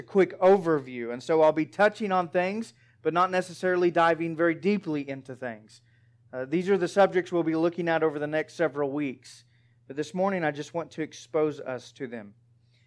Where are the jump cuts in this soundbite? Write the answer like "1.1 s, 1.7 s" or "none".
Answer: none